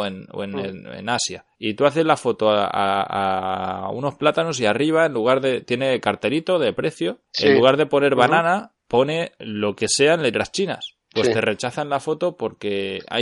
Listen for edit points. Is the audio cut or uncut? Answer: cut